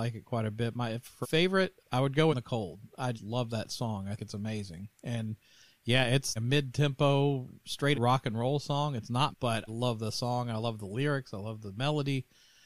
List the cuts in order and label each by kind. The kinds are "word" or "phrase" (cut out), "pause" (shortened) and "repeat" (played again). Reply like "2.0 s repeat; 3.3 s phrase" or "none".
1.2 s word; 1.8 s word; 2.3 s word; 3.2 s word; 4.2 s word; 6.4 s word; 7.9 s word; 9.3 s word; 9.7 s word